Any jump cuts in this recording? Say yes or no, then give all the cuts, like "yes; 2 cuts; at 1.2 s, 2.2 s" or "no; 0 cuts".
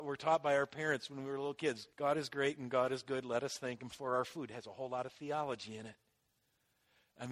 yes; 1 cut; at 1.9 s